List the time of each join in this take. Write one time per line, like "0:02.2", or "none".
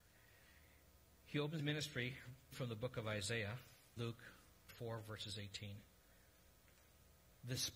0:01.6
0:02.5
0:04.0
0:04.7